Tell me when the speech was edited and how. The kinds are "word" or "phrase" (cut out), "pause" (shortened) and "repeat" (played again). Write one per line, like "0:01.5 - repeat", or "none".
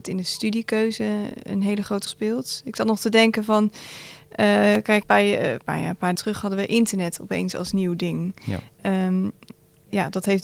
0:02.1 - word
0:05.0 - word
0:05.6 - word
0:06.1 - word

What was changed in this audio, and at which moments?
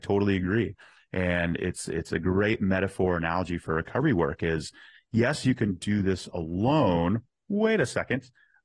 none

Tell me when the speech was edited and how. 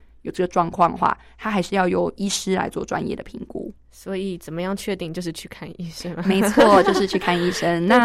0:03.8 - pause

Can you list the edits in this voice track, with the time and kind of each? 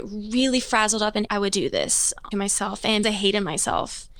0:01.3 - word
0:02.3 - word
0:03.0 - word

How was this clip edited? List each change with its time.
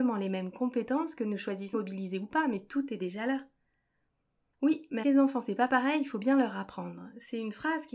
0:01.7 - word
0:05.0 - word

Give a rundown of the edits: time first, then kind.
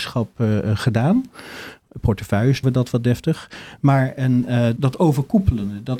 0:02.6 - word
0:04.8 - word

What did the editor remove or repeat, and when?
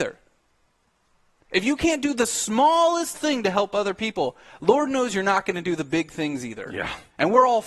0:03.1 - word

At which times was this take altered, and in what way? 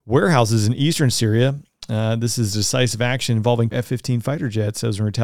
0:03.7 - word

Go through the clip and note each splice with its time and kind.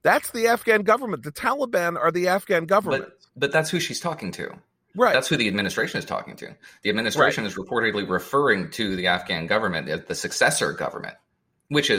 none

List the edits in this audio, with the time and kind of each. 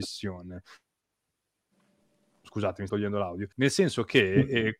0:02.9 - word
0:03.5 - pause

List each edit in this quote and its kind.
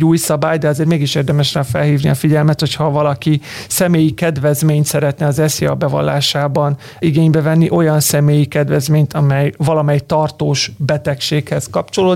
none

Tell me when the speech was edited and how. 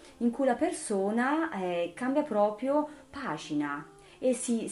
none

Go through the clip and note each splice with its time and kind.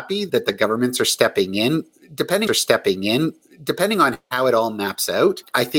0:02.5 - repeat

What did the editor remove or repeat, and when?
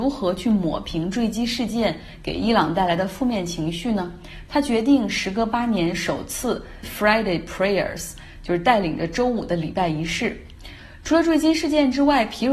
0:06.8 - word

